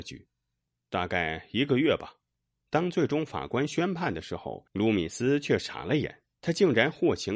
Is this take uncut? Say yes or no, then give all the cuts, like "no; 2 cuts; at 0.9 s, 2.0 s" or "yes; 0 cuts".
no; 3 cuts; at 2.2 s, 4.7 s, 6.3 s